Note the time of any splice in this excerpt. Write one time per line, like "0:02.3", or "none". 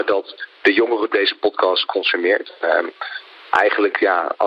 0:01.1